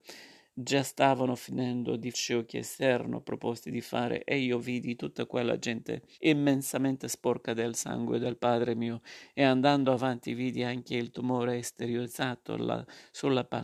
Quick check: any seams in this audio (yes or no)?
yes